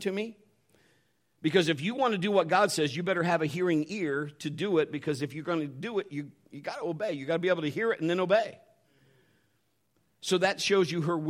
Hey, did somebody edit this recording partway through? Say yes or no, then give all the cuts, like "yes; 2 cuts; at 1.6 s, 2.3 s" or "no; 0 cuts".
no; 0 cuts